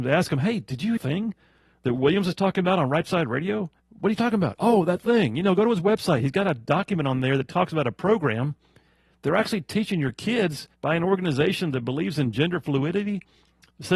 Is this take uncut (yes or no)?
no